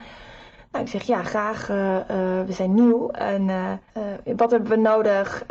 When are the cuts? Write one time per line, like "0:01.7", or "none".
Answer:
0:03.9

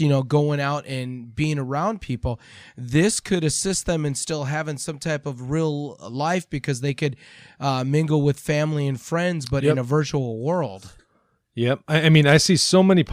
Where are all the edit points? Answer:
none

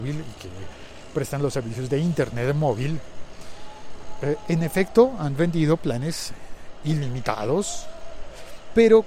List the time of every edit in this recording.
none

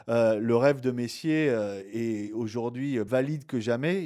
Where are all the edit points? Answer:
0:03.1

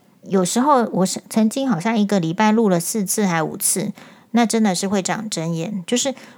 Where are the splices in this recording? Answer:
none

